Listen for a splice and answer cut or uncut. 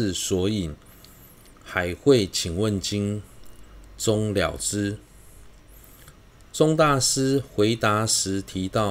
uncut